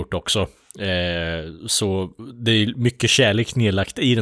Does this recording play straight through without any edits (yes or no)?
yes